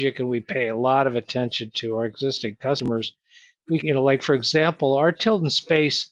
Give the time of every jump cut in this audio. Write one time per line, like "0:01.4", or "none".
0:03.8